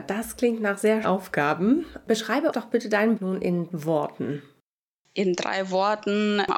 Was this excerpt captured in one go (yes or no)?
no